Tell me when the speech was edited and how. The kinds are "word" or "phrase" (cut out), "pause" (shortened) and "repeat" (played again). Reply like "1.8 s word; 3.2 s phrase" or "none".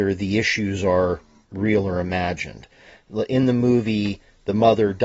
none

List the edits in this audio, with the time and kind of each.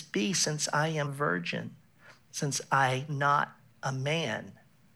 1.0 s word; 3.1 s word

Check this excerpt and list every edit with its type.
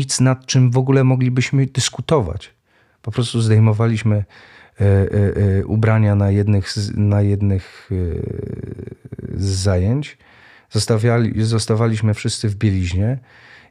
none

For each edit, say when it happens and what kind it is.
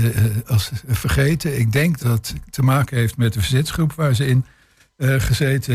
2.0 s word

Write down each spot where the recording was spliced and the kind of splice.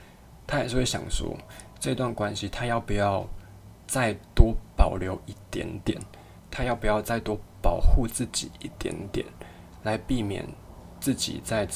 3.8 s pause

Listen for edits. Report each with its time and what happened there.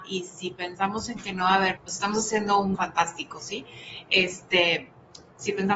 1.8 s word; 2.7 s word

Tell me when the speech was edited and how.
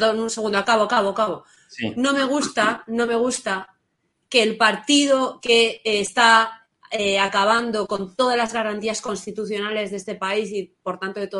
none

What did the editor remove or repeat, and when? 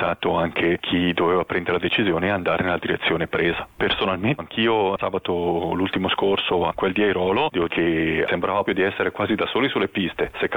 4.4 s word; 7.7 s word; 8.7 s word

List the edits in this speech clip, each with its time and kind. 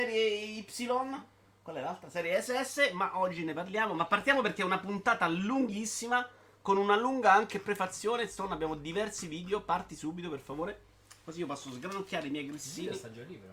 none

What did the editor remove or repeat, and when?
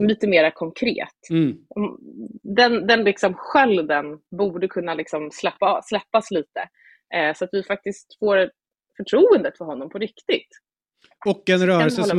none

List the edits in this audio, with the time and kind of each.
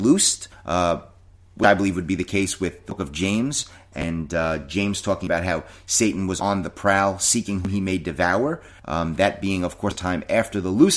none

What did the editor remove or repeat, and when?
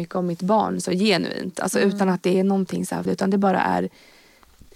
3.1 s phrase

